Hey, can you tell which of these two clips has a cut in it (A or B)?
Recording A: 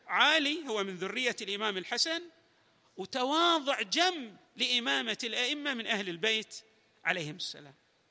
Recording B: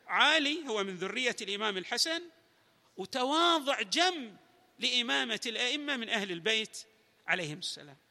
A